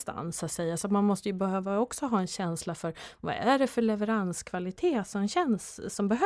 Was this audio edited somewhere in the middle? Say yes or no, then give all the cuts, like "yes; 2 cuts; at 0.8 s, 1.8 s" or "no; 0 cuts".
no; 0 cuts